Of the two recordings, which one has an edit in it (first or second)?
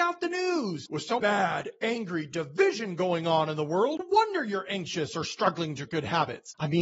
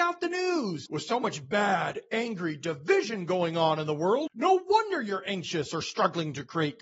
first